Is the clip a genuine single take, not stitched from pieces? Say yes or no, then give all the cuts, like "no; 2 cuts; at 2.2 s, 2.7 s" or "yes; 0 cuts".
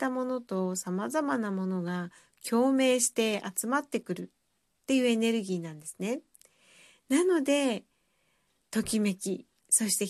yes; 0 cuts